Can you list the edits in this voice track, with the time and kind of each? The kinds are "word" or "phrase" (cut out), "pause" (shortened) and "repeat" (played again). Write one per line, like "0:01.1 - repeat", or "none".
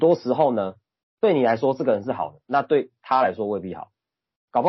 0:01.0 - pause